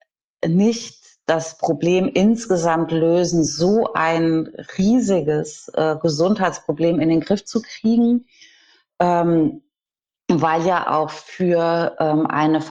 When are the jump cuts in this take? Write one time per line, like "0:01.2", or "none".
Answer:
none